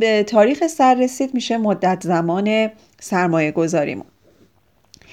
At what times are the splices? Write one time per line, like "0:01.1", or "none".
none